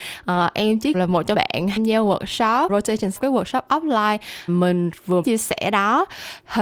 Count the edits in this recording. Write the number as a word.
seven